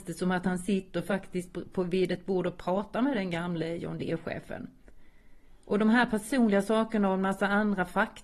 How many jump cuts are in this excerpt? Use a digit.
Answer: 0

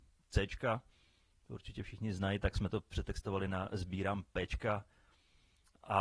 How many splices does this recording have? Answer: 0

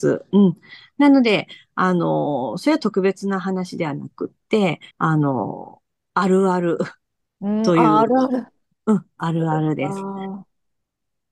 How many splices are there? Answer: 1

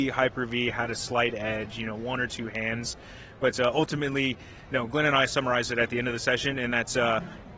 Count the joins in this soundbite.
0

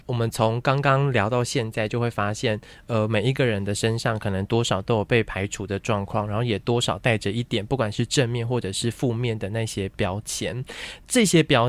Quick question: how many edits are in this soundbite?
0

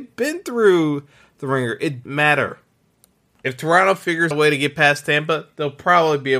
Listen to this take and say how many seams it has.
2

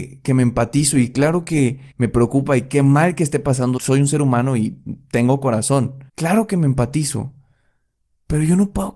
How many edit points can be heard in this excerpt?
3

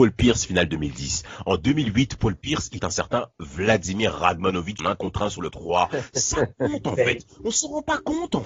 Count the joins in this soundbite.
3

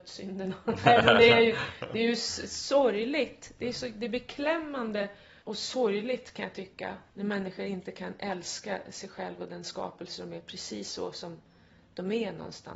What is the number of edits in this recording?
2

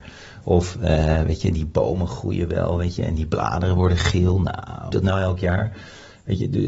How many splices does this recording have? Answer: 1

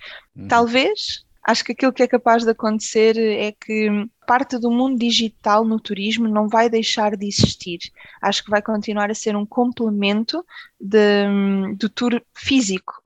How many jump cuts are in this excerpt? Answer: 0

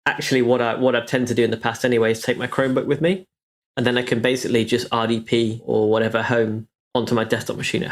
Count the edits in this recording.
0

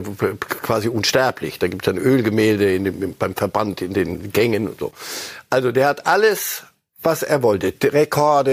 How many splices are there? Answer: 0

